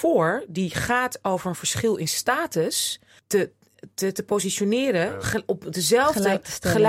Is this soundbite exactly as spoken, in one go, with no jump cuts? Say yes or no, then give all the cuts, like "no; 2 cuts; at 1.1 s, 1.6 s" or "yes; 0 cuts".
no; 1 cut; at 3.2 s